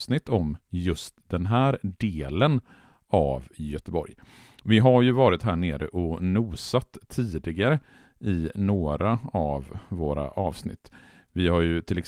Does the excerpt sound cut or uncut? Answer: uncut